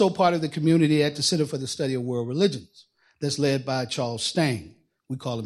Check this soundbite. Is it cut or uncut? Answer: uncut